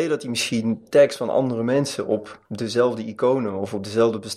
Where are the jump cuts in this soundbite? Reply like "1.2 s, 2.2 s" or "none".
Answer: 2.5 s